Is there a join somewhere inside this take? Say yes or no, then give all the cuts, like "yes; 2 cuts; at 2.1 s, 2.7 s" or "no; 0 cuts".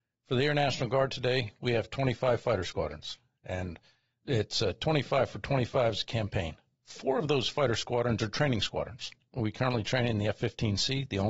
no; 0 cuts